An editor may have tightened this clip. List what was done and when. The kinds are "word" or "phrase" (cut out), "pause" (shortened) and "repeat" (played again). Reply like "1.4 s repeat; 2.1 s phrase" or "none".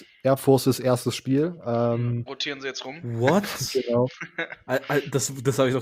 2.3 s word